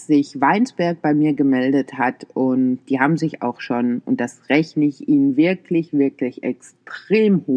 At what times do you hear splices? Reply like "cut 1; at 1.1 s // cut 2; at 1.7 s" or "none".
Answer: none